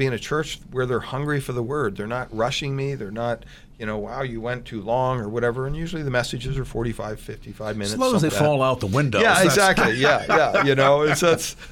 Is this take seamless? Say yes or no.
no